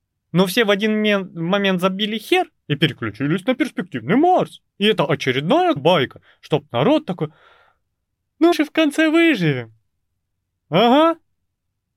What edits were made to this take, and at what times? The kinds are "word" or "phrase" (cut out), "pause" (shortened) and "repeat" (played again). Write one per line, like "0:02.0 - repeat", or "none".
0:02.6 - pause
0:04.7 - pause
0:05.8 - word
0:08.5 - word